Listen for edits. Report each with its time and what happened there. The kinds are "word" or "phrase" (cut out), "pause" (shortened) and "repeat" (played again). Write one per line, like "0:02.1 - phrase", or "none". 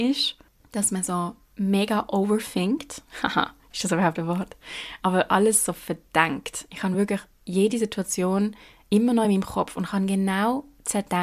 none